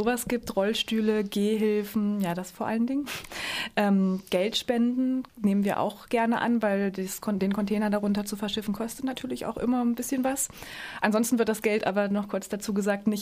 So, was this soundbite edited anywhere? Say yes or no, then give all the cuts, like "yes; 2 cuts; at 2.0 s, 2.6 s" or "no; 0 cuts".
yes; 1 cut; at 5.3 s